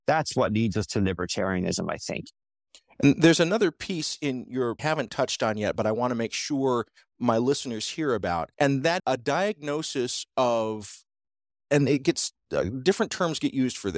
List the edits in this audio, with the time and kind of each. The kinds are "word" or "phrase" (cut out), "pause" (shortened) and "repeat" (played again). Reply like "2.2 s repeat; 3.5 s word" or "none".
4.8 s phrase; 8.5 s pause; 9.0 s word